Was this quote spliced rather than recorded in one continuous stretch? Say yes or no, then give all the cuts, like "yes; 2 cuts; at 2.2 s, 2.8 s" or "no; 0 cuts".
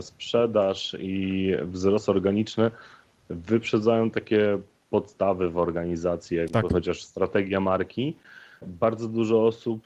no; 0 cuts